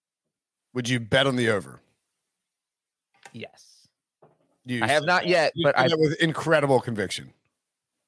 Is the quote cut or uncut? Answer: uncut